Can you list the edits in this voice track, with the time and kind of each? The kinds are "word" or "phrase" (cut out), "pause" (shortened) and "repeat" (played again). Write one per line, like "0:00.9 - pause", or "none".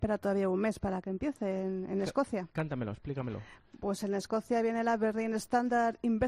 0:02.5 - pause